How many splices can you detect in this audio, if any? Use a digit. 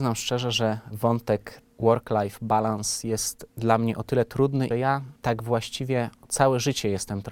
4